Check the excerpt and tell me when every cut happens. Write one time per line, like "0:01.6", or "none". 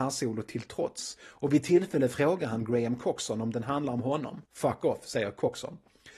0:04.5